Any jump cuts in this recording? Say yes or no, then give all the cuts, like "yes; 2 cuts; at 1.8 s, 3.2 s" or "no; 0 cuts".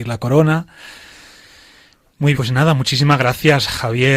yes; 1 cut; at 2.3 s